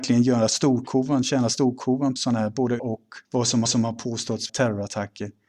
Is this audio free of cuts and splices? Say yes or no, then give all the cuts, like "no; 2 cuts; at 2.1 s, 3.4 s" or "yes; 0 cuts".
no; 5 cuts; at 2.2 s, 2.8 s, 3.2 s, 3.6 s, 4.5 s